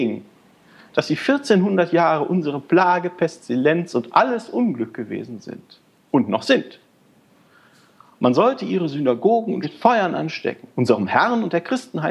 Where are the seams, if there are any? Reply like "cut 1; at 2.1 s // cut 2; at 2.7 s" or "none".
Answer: cut 1; at 9.6 s // cut 2; at 10.7 s